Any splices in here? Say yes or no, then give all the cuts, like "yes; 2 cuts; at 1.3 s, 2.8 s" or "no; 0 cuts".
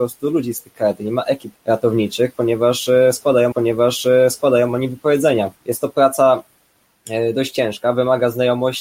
yes; 3 cuts; at 1.6 s, 3.5 s, 5.6 s